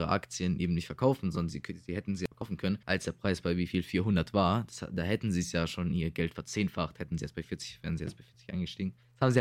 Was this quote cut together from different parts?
yes; 1 cut; at 2.8 s

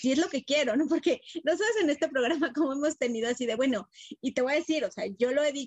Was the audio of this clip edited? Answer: no; 0 cuts

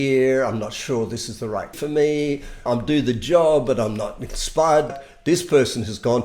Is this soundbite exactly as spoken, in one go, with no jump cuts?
no; 3 cuts; at 1.7 s, 2.7 s, 4.9 s

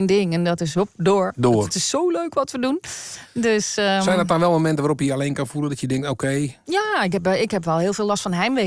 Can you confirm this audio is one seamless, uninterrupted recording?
yes; 0 cuts

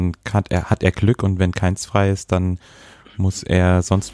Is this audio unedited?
yes; 0 cuts

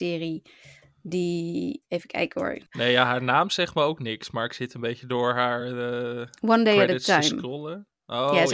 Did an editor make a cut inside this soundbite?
no; 0 cuts

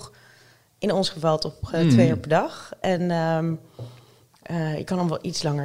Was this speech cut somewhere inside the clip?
no; 0 cuts

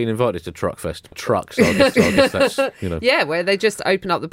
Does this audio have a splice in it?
yes; 2 cuts; at 1.1 s, 1.9 s

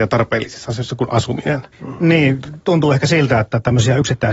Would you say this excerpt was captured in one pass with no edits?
no; 1 cut; at 1.7 s

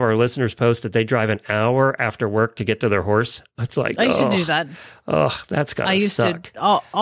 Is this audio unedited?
yes; 0 cuts

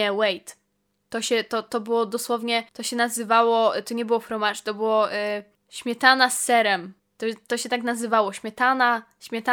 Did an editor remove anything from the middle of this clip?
yes; 3 cuts; at 2.7 s, 5.5 s, 7.0 s

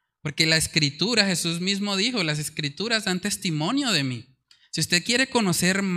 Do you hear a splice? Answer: no; 0 cuts

